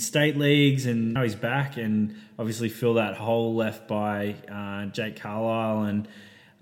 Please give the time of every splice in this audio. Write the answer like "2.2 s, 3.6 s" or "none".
1.2 s